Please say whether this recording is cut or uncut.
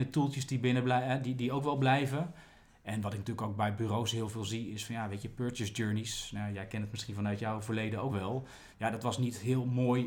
cut